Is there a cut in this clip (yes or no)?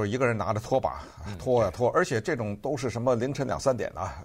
no